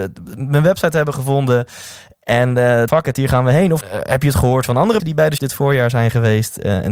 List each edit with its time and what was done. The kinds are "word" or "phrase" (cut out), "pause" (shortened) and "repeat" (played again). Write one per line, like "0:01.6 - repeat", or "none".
0:02.9 - phrase
0:03.8 - word
0:05.0 - word
0:05.4 - word